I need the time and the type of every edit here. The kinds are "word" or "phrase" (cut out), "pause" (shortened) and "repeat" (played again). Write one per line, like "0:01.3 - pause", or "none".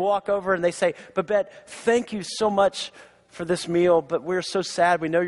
none